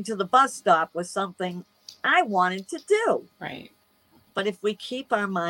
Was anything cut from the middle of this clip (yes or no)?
yes